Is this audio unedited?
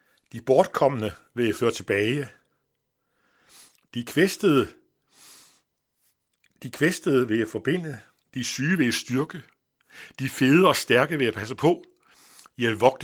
yes; 0 cuts

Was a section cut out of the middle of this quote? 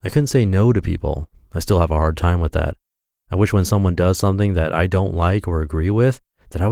no; 0 cuts

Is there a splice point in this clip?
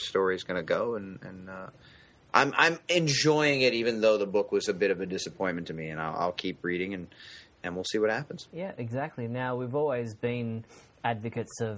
no; 0 cuts

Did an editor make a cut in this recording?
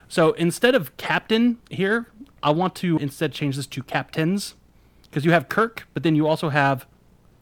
yes; 2 cuts; at 1.6 s, 3.0 s

